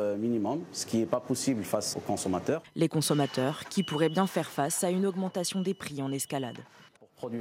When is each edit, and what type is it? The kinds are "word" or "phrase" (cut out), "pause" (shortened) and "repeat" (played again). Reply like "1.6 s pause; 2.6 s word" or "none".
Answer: 1.9 s word